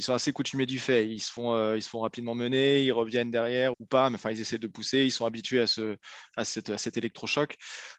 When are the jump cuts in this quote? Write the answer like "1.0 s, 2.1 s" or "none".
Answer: 3.7 s